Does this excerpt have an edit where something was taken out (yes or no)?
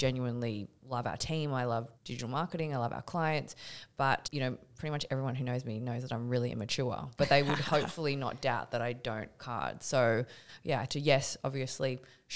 yes